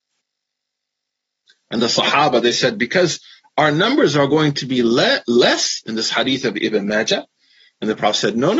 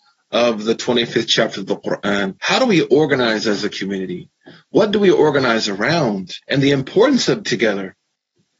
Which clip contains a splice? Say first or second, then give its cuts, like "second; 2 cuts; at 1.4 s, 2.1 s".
second; 3 cuts; at 2.4 s, 6.4 s, 7.4 s